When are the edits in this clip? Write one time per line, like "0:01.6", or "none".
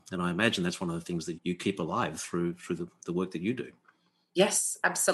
0:01.4